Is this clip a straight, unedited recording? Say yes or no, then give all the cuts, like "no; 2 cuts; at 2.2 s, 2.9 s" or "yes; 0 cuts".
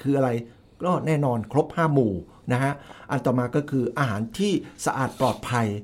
yes; 0 cuts